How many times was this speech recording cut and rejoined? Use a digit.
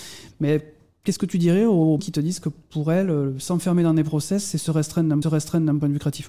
2